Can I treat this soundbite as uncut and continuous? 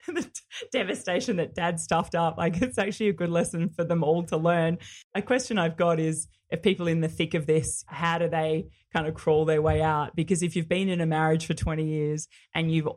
no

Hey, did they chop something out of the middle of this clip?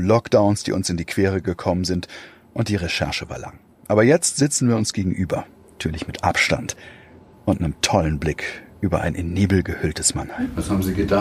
no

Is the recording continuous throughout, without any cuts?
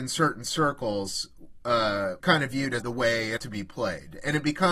no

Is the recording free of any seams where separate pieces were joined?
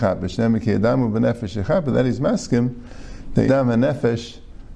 no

